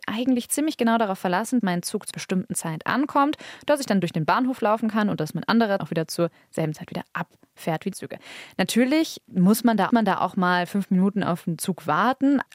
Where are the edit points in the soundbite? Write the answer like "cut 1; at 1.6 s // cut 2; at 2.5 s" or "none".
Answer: cut 1; at 1.6 s // cut 2; at 2.1 s // cut 3; at 5.8 s // cut 4; at 7.9 s // cut 5; at 9.9 s

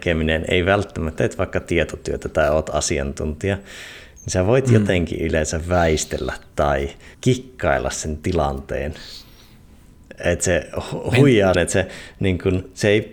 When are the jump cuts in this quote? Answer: cut 1; at 1.2 s // cut 2; at 7.1 s // cut 3; at 11.5 s

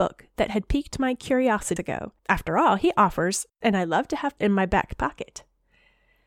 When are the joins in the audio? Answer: cut 1; at 1.8 s // cut 2; at 2.2 s // cut 3; at 3.5 s // cut 4; at 4.4 s

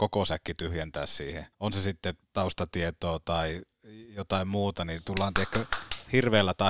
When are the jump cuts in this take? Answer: cut 1; at 1.5 s // cut 2; at 2.2 s

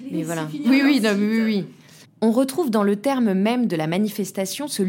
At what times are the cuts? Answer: cut 1; at 2.0 s

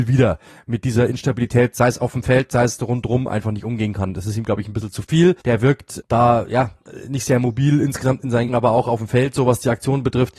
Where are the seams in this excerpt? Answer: cut 1; at 5.4 s // cut 2; at 6.0 s // cut 3; at 8.5 s

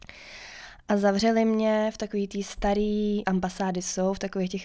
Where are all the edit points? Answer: cut 1; at 3.2 s

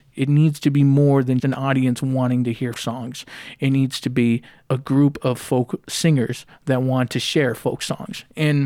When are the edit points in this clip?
cut 1; at 1.4 s // cut 2; at 2.7 s // cut 3; at 4.6 s

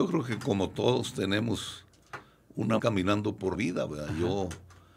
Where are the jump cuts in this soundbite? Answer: cut 1; at 2.8 s // cut 2; at 3.5 s

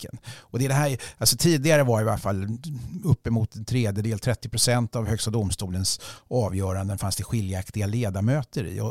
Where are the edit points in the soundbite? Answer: none

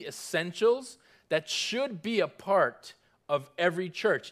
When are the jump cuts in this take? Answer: none

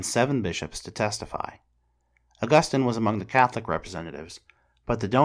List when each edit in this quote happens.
none

